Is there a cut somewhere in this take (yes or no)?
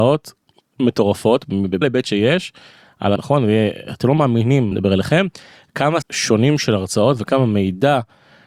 yes